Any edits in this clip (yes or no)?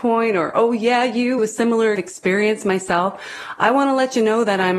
yes